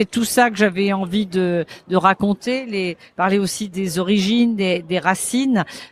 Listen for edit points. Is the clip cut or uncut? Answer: uncut